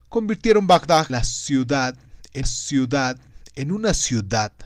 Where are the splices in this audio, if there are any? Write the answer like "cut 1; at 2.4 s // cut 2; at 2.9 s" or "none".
cut 1; at 1.1 s // cut 2; at 2.4 s